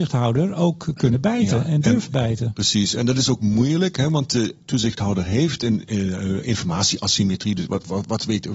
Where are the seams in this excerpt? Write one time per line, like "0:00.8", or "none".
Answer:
none